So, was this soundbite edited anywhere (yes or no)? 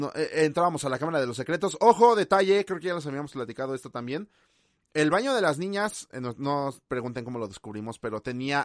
yes